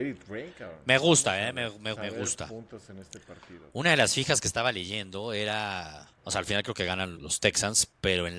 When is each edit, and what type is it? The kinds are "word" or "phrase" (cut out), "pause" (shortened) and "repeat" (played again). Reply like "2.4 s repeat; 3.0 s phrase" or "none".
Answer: 1.9 s phrase; 6.2 s pause; 7.2 s word